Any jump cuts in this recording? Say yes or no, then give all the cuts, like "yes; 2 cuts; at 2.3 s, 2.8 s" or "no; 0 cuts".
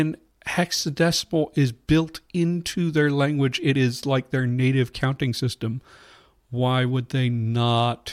no; 0 cuts